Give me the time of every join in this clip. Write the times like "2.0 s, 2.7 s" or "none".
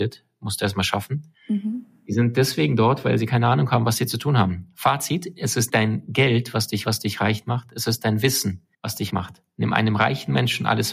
1.3 s, 5.7 s, 6.8 s, 8.7 s, 9.1 s